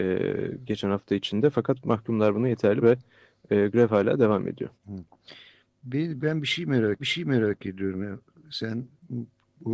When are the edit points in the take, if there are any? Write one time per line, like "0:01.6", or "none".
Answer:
0:02.8
0:04.7
0:06.2
0:07.0